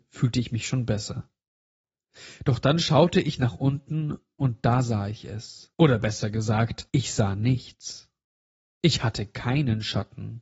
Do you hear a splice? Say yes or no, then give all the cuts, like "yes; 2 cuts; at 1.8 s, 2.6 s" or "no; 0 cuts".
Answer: yes; 2 cuts; at 5.7 s, 6.9 s